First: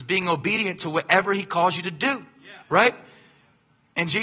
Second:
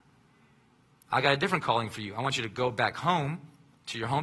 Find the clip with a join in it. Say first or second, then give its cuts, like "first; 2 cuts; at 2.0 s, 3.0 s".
first; 1 cut; at 2.6 s